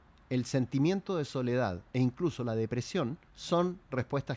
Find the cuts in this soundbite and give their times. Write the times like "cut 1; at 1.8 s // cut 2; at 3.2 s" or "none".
cut 1; at 3.2 s